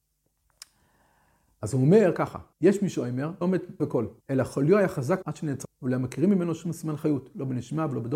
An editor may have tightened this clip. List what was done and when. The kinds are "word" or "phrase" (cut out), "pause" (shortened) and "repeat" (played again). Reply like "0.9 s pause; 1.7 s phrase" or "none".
2.5 s pause; 3.4 s word; 3.8 s word; 4.2 s pause; 5.2 s word; 5.6 s word